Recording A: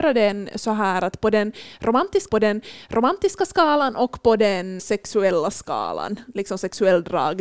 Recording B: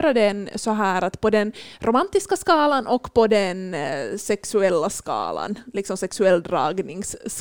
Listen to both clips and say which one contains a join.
A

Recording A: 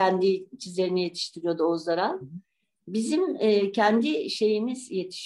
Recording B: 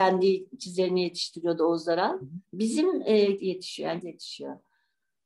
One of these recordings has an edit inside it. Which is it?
B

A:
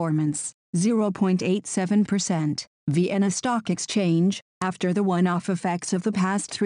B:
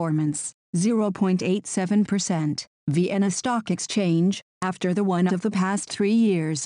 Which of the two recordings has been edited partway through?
B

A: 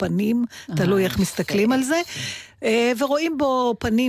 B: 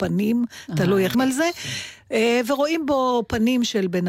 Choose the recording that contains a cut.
B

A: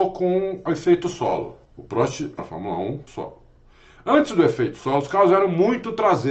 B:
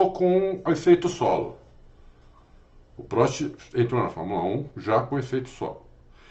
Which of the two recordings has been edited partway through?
A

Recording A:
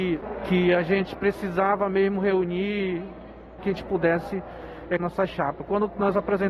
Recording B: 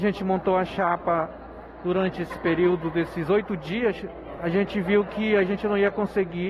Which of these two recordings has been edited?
A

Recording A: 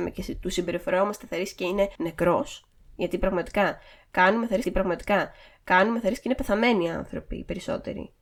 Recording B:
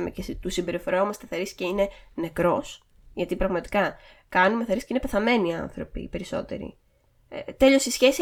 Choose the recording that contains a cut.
A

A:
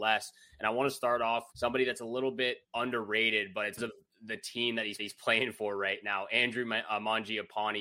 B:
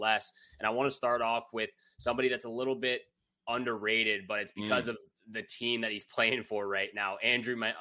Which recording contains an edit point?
A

